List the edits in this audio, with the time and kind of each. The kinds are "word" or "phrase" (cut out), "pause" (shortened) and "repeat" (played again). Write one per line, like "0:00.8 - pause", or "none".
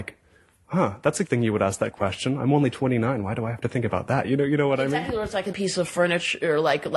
0:01.3 - word
0:05.5 - word